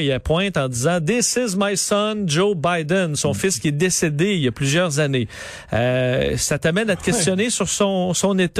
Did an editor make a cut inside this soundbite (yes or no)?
no